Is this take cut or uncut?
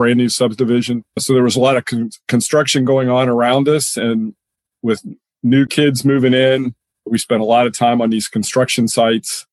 uncut